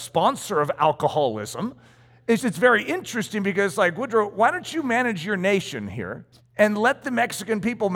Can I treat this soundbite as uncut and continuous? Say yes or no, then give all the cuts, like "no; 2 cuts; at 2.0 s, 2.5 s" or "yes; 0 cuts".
no; 2 cuts; at 2.4 s, 6.3 s